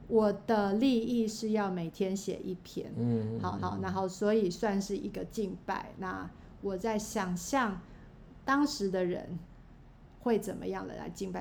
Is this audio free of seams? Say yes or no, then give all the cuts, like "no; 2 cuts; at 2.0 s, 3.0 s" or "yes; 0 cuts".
no; 1 cut; at 3.6 s